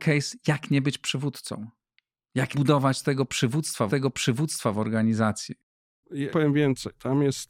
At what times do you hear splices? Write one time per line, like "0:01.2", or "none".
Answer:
0:02.5
0:03.9
0:06.3